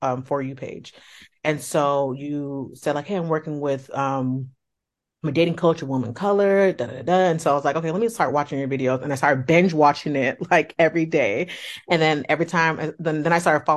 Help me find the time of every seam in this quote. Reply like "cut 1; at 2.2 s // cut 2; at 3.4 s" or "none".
none